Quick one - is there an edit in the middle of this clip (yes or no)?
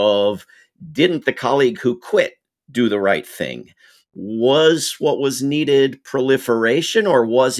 no